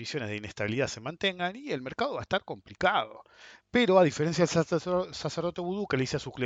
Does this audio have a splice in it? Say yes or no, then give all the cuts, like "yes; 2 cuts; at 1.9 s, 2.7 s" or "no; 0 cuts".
no; 0 cuts